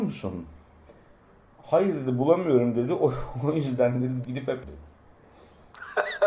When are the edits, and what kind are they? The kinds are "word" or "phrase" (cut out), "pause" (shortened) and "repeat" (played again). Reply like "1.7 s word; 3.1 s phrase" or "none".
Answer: 4.2 s word; 4.6 s phrase

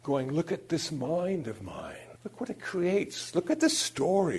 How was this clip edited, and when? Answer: 2.2 s pause

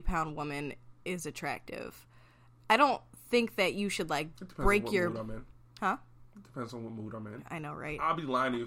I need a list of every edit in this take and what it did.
none

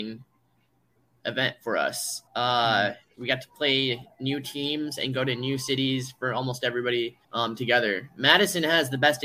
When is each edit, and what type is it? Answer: 2.3 s pause; 7.2 s pause

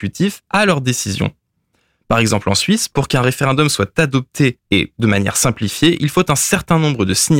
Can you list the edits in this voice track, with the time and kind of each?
none

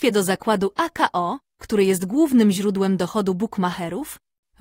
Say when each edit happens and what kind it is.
none

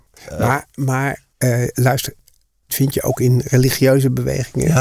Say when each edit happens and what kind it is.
1.3 s pause; 2.7 s word

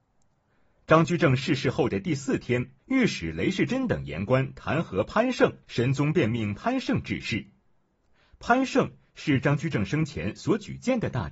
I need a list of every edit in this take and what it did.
2.8 s pause; 5.6 s pause

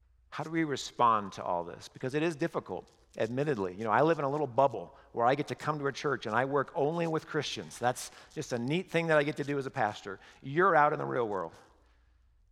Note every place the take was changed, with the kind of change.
none

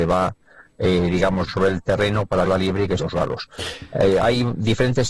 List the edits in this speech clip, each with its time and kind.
1.5 s phrase; 2.4 s word; 3.0 s word

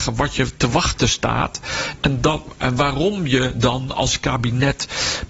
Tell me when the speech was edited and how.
none

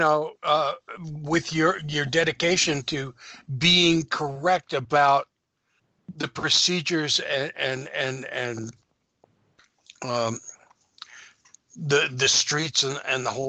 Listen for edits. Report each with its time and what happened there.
none

